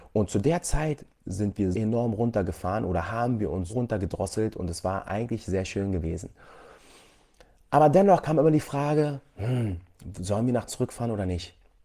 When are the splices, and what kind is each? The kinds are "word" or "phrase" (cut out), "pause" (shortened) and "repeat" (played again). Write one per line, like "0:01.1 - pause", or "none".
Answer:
0:01.7 - word
0:03.7 - word
0:10.7 - word